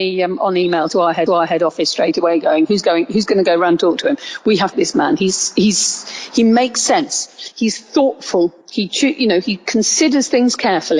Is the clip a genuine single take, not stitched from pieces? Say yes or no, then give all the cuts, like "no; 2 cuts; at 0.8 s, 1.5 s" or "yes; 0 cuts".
no; 3 cuts; at 1.3 s, 4.7 s, 8.6 s